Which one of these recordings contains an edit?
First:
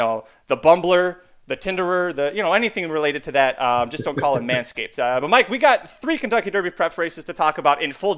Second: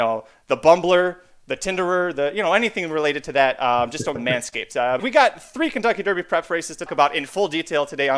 second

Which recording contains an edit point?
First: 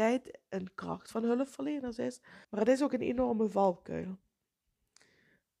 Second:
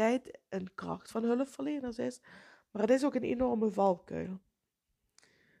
first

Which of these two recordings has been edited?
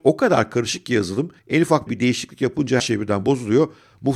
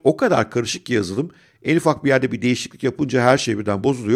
first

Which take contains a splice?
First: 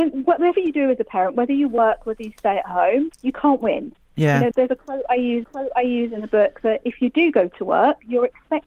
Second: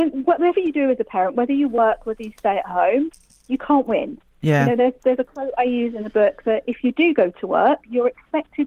first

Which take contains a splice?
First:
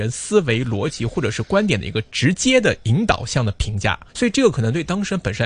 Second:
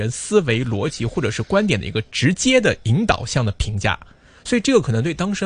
first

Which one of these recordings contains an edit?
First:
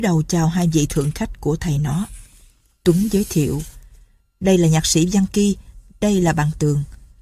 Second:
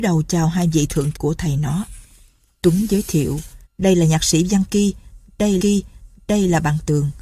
second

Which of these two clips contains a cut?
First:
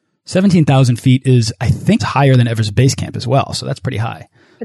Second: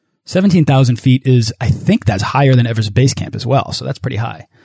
first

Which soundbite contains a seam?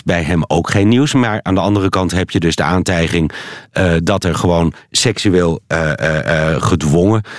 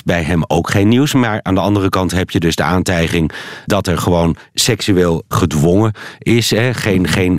second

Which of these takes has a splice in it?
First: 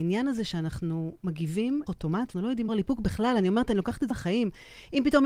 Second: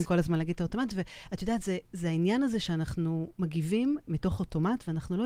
first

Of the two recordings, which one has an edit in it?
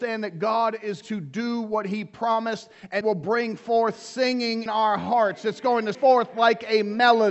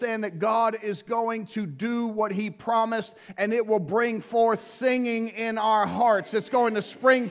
first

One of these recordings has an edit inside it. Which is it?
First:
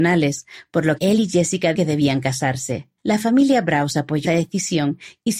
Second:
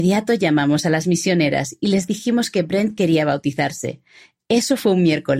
first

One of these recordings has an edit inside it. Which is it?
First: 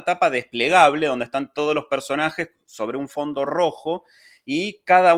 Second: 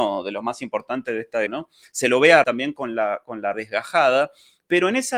second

